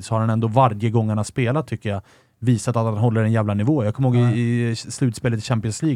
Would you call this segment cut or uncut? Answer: uncut